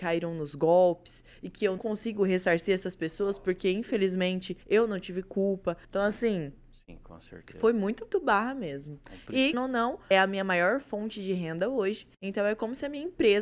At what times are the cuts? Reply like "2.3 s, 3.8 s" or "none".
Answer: 1.8 s, 4.6 s, 5.8 s, 8.1 s, 9.5 s, 10.1 s, 12.1 s